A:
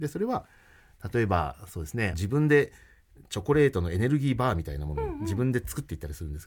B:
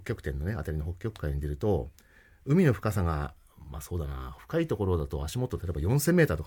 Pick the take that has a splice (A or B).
A